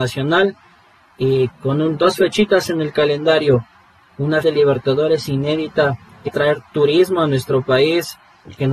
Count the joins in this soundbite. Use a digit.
3